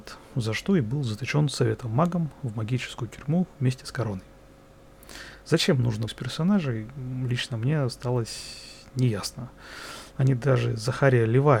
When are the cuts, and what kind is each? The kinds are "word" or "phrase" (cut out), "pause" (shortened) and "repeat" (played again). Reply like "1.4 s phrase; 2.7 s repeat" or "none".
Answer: 5.4 s pause; 6.1 s phrase